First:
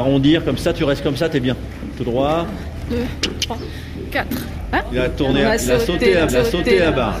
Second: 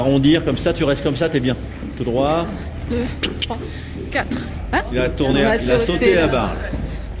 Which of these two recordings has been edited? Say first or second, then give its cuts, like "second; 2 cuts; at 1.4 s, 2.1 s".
first; 1 cut; at 6.3 s